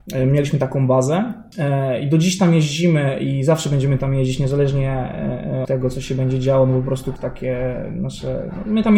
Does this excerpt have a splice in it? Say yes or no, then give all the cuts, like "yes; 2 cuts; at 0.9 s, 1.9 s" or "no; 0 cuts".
yes; 2 cuts; at 5.6 s, 7.2 s